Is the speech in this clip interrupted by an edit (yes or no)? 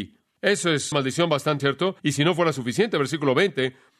yes